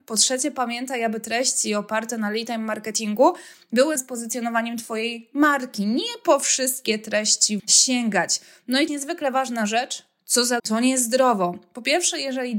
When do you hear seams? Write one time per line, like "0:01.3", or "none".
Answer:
0:04.0
0:07.6
0:08.9
0:10.6